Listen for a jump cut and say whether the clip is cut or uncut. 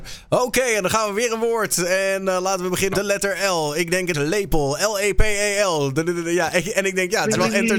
cut